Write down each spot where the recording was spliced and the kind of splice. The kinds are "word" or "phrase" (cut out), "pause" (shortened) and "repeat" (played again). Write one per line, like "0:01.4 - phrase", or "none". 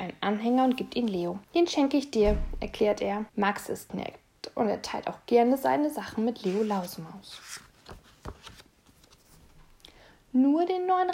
0:01.4 - pause
0:03.3 - pause
0:03.9 - word